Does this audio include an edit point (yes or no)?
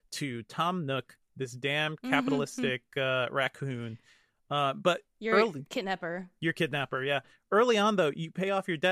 no